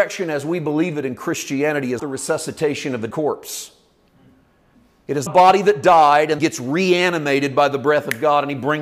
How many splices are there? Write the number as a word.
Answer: four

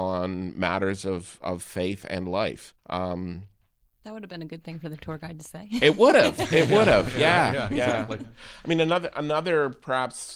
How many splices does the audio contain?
one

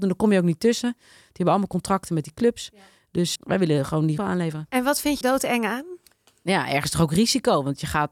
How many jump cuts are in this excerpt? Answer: three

